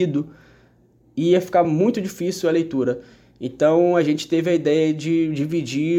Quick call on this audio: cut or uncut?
uncut